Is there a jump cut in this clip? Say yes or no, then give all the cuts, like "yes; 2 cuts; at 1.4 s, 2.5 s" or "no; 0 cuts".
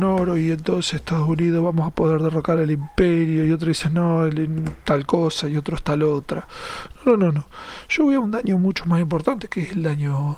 no; 0 cuts